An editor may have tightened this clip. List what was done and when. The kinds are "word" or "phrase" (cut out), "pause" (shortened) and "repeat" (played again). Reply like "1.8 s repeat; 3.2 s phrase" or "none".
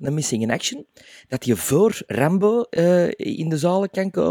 none

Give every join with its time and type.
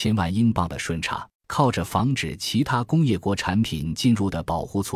1.3 s pause

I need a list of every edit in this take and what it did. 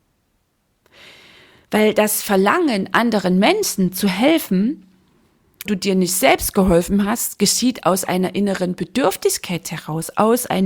5.7 s word

